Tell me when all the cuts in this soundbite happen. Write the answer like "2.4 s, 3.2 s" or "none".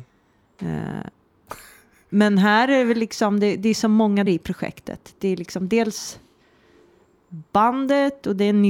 4.3 s

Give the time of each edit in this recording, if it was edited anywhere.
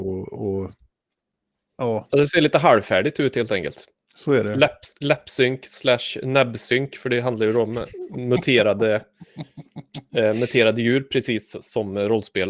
none

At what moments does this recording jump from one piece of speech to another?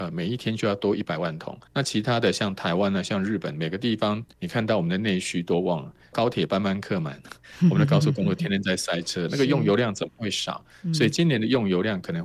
1.7 s, 4.3 s

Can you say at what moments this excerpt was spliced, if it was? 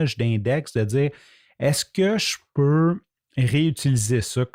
none

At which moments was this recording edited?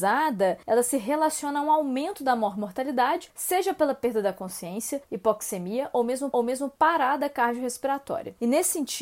6.3 s

